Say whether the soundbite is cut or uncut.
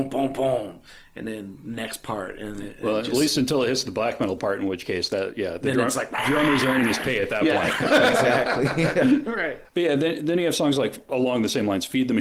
uncut